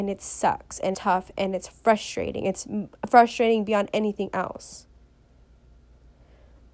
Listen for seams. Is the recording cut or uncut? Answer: cut